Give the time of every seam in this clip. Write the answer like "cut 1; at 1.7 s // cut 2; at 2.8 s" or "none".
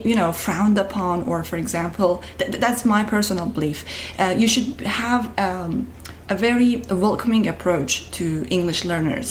none

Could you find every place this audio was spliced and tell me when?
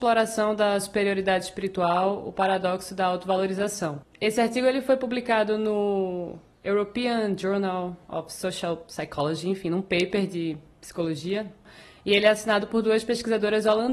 none

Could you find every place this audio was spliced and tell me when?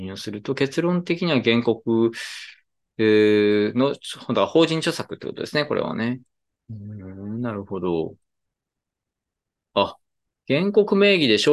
none

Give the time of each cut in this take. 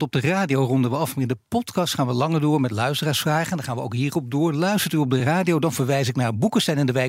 none

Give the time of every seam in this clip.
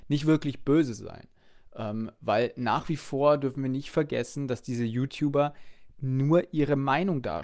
none

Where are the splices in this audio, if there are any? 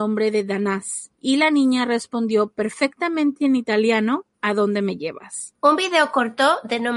cut 1; at 4.3 s

